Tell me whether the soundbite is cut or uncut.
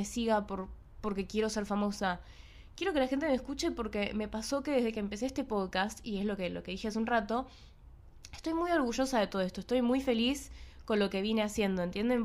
uncut